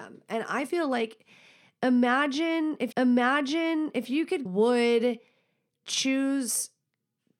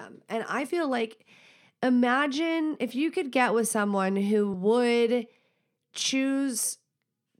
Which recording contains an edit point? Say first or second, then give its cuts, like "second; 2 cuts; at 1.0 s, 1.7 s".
first; 2 cuts; at 2.9 s, 4.5 s